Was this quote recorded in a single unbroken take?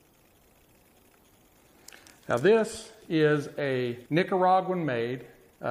no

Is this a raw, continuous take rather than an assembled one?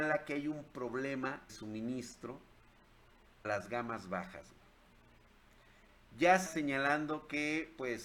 no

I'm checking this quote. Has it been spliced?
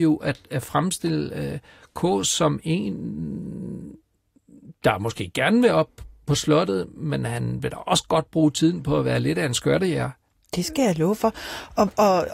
no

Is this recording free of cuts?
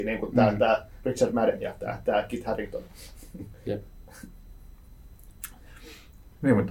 yes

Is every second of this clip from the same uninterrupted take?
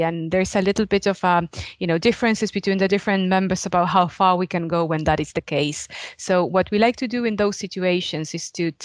yes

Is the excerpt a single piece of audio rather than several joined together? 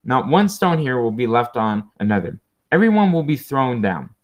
no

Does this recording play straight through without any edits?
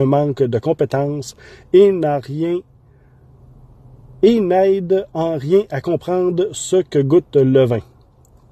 yes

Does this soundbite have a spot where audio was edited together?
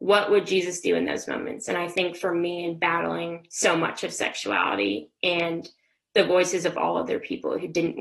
no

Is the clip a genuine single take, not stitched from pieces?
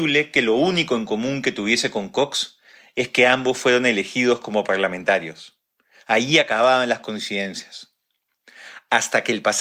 yes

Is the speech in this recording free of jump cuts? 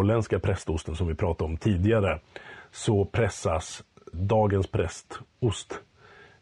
yes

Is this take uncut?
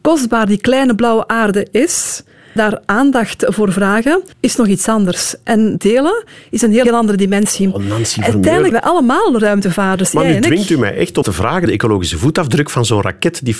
no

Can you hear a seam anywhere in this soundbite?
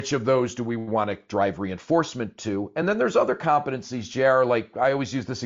no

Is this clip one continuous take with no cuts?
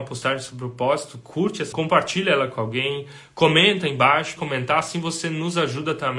no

